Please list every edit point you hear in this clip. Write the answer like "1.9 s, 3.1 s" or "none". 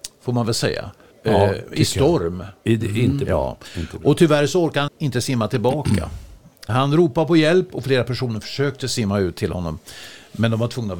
1.1 s, 4.9 s, 6.7 s